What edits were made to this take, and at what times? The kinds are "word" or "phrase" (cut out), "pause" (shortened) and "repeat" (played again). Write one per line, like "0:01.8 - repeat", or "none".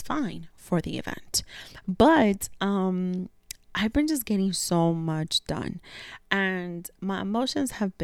none